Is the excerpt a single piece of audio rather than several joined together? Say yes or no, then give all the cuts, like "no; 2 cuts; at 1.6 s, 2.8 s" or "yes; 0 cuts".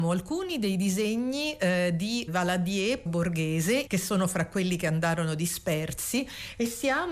no; 3 cuts; at 2.3 s, 3.1 s, 3.9 s